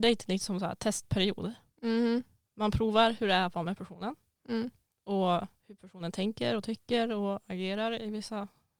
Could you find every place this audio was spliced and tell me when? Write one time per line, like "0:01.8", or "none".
none